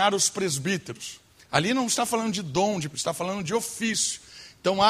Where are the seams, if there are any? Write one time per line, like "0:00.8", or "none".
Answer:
0:02.9